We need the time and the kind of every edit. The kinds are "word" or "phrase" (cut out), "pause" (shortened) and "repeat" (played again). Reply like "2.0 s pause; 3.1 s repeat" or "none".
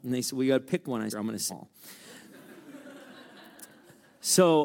1.1 s phrase; 1.5 s word